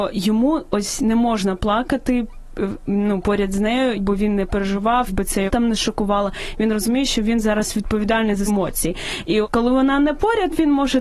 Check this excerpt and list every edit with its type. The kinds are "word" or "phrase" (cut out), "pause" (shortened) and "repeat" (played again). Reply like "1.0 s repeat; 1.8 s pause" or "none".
3.9 s word; 5.1 s word; 5.5 s word; 8.5 s word; 9.4 s word

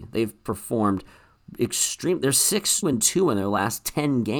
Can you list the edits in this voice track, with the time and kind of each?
2.8 s word

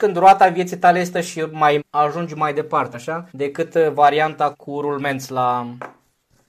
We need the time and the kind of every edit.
1.1 s word; 1.8 s word; 2.9 s word; 3.3 s pause; 4.5 s word

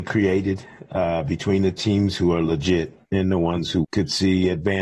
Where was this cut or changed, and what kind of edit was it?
3.0 s pause; 3.8 s word

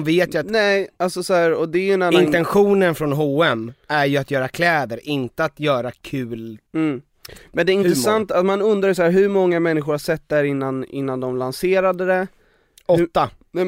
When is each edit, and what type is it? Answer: 6.7 s pause

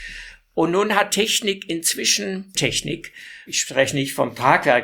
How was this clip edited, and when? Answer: 1.1 s word; 2.5 s word; 3.5 s word

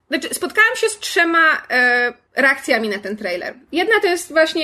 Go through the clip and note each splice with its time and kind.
2.3 s pause

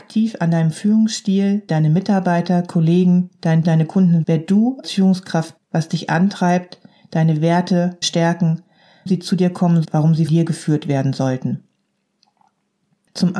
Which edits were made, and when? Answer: 1.7 s word; 3.6 s word; 4.2 s word; 4.8 s word; 5.6 s word; 8.0 s word; 9.1 s word; 9.8 s word; 10.3 s word

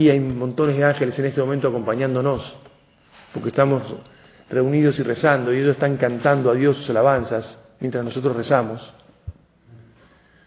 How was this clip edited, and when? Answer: none

